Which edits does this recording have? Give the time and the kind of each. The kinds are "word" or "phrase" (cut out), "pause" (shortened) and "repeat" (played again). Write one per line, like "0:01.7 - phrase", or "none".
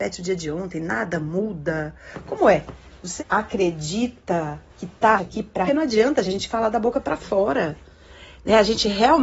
0:03.2 - word
0:04.7 - pause
0:05.2 - word
0:05.7 - phrase
0:06.2 - word